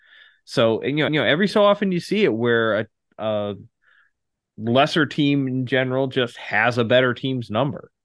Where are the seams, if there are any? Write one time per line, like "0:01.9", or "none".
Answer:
0:01.1